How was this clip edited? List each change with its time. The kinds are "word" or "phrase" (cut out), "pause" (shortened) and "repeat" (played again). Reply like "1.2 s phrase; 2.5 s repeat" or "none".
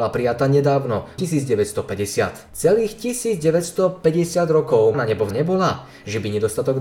1.2 s word; 4.9 s word; 5.3 s word